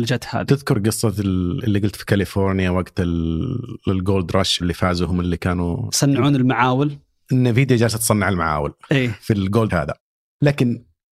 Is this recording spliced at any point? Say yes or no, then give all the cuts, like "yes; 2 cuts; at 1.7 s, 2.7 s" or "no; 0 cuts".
yes; 2 cuts; at 4.6 s, 9.7 s